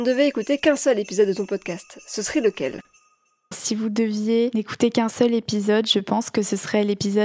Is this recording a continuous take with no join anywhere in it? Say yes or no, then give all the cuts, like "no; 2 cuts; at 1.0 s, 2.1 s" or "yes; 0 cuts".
no; 1 cut; at 3.5 s